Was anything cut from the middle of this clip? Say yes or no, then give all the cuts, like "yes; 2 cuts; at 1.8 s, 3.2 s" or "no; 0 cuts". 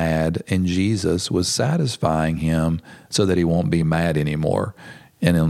no; 0 cuts